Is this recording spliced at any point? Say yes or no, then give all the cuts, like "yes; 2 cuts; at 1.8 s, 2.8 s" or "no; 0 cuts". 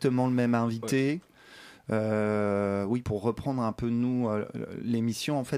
yes; 1 cut; at 3.0 s